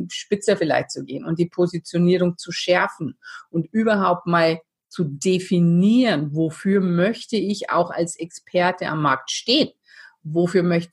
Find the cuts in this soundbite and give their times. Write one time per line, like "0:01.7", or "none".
none